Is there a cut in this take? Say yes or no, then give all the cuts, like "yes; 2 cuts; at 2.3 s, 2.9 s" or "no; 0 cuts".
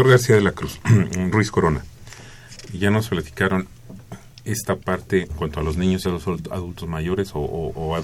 yes; 3 cuts; at 1.3 s, 5.3 s, 6.0 s